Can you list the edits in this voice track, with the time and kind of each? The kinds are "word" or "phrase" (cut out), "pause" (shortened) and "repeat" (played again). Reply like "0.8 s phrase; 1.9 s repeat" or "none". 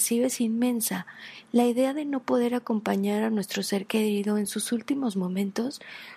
none